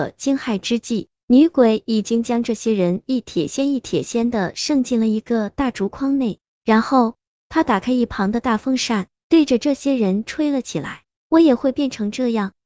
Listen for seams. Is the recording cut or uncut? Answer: uncut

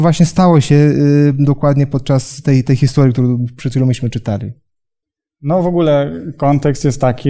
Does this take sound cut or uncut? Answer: uncut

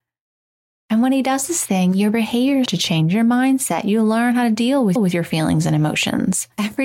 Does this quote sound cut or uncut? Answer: cut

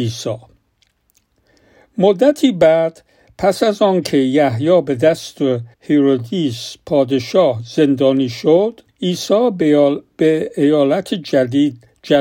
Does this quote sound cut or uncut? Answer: cut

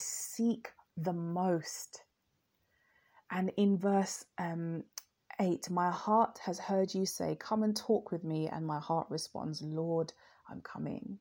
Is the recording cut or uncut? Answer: uncut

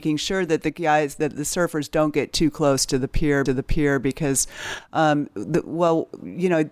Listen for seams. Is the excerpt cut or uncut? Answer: cut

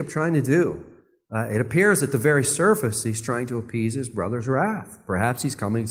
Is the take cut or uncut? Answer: uncut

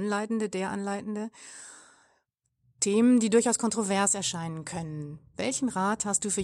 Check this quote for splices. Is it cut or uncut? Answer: uncut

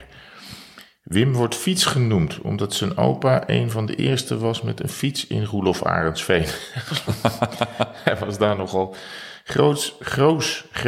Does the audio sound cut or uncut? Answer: uncut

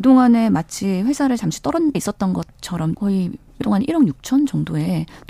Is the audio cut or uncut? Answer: cut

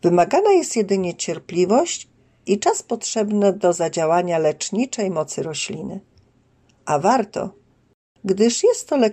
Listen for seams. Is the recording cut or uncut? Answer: uncut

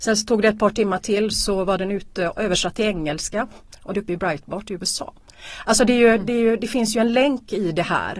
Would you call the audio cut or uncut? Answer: cut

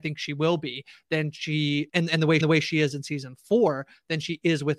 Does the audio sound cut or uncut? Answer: cut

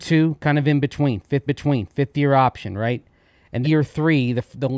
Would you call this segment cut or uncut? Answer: cut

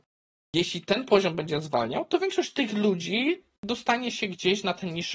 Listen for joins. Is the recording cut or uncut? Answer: uncut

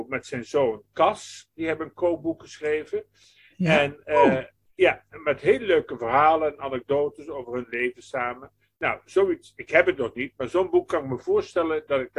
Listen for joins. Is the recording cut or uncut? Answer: uncut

